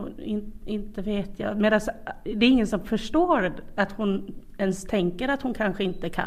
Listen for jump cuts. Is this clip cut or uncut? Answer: uncut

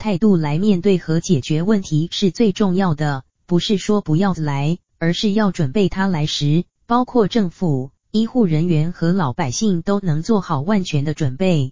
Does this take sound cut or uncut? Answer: cut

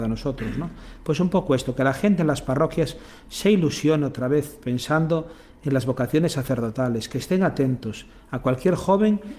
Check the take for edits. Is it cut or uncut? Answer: uncut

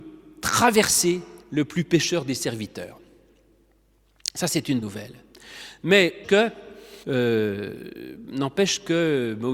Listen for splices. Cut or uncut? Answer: cut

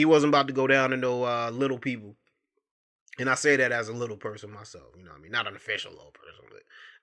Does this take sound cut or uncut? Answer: uncut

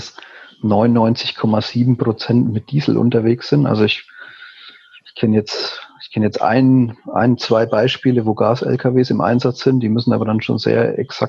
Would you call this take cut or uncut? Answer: uncut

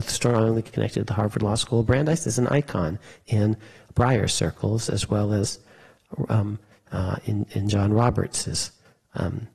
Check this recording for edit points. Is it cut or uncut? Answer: uncut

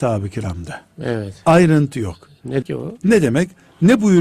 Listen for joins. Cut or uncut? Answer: cut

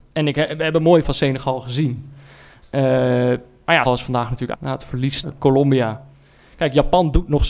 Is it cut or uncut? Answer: cut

